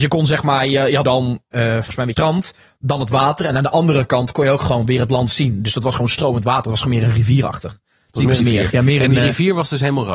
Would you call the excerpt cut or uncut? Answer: cut